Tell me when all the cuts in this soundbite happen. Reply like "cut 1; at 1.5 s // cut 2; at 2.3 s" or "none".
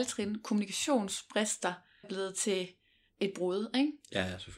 cut 1; at 2.0 s // cut 2; at 3.1 s